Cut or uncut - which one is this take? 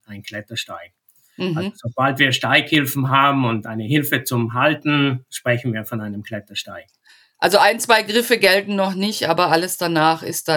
uncut